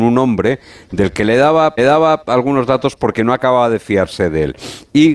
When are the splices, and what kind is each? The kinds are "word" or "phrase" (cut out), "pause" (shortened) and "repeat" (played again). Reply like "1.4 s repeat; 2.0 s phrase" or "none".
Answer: 1.8 s repeat

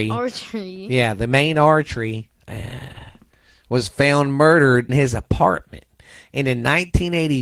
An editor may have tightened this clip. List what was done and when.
2.4 s pause; 4.9 s word

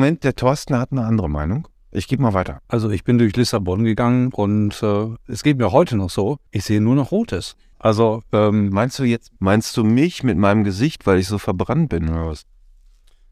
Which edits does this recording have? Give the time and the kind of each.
2.6 s pause; 6.5 s pause; 7.7 s pause; 9.4 s pause

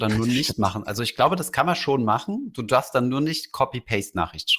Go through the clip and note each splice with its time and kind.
none

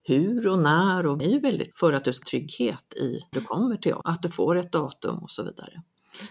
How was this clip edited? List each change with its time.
1.2 s phrase; 1.7 s word; 2.2 s word; 3.3 s word; 4.0 s word

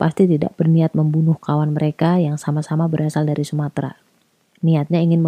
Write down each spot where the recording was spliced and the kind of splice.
none

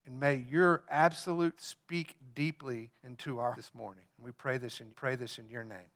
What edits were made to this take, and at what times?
1.6 s word; 3.0 s pause; 3.5 s word; 4.1 s pause; 4.9 s repeat

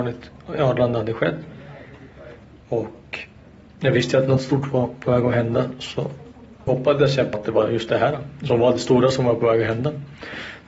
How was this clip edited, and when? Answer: 6.7 s word; 7.3 s word

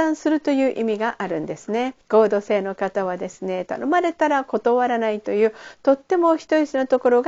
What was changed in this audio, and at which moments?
2.0 s pause

